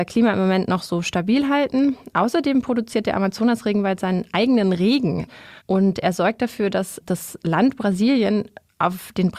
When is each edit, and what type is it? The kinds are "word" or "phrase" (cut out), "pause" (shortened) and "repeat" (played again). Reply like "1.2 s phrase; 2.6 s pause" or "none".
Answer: 5.6 s pause